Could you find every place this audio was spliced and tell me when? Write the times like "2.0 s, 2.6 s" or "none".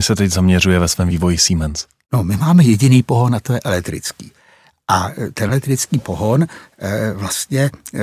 none